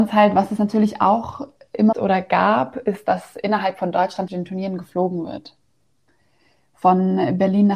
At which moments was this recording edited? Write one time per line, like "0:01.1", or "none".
0:01.9
0:04.3